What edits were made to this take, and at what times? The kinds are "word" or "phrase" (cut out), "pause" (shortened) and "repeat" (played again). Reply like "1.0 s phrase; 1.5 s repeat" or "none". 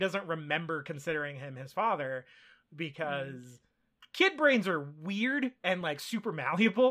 none